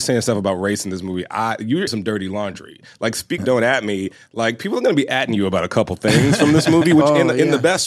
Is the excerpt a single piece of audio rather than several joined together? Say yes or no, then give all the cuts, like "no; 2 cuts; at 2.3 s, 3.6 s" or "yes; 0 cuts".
no; 2 cuts; at 1.9 s, 3.4 s